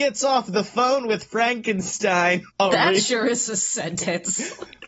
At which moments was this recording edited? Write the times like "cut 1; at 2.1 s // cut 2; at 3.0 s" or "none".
cut 1; at 2.5 s